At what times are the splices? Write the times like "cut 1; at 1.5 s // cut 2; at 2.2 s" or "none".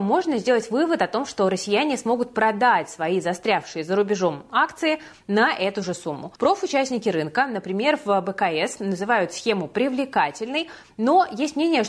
cut 1; at 6.4 s